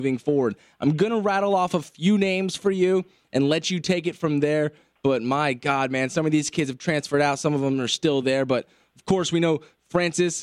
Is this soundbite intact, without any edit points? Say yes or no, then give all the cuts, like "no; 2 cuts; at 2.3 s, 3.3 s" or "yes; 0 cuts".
yes; 0 cuts